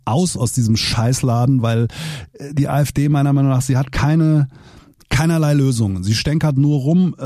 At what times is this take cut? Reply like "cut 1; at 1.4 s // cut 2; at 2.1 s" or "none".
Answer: none